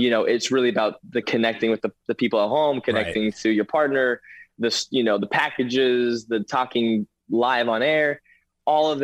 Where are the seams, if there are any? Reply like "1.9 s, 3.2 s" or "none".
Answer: 1.2 s

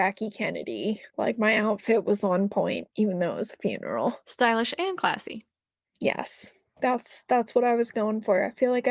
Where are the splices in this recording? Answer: 1.1 s

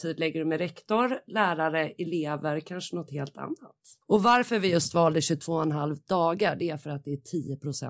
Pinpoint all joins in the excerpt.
4.0 s

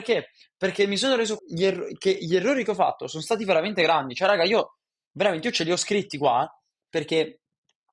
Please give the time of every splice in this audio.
1.4 s

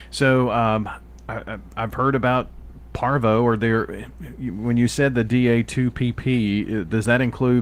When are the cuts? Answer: none

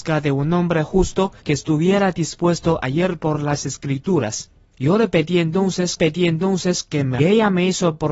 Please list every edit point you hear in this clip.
1.4 s, 4.6 s, 6.0 s, 7.2 s

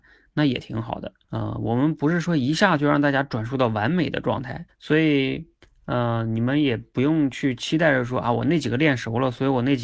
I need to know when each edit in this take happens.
1.2 s, 4.7 s, 5.6 s

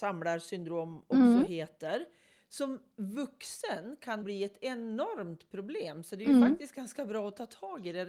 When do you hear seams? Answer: 4.2 s

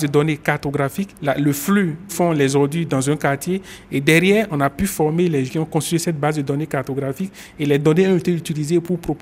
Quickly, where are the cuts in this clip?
1.2 s, 2.1 s, 5.5 s

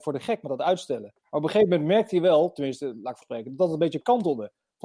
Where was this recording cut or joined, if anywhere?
1.2 s, 3.2 s

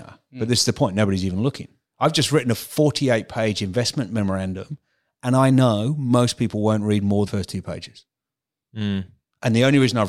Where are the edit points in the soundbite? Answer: 7.3 s

